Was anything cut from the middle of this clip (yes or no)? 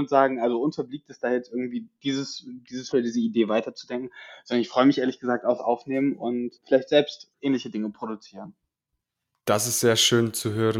yes